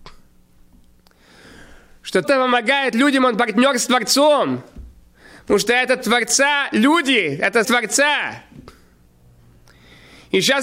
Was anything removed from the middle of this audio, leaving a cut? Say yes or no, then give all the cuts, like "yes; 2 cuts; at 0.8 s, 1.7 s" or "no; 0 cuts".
yes; 2 cuts; at 2.2 s, 7.6 s